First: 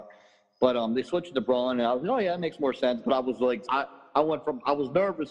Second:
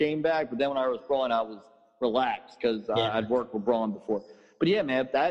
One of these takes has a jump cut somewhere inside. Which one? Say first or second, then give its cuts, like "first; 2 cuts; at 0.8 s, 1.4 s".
first; 1 cut; at 3.7 s